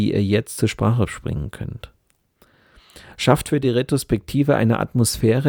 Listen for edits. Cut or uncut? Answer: uncut